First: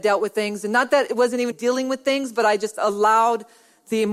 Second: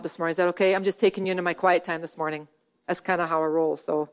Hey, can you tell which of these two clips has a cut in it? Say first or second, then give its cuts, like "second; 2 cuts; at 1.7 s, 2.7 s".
first; 2 cuts; at 1.1 s, 1.5 s